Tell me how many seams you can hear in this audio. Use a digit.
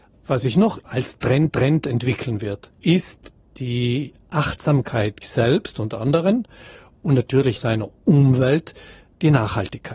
4